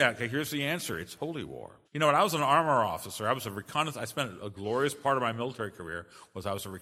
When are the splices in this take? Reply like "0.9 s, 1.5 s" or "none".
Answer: 1.8 s, 4.4 s